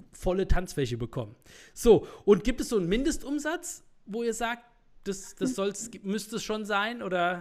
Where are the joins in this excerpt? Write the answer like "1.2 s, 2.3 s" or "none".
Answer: none